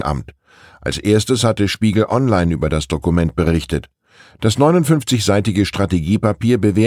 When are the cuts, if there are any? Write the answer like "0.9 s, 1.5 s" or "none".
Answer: none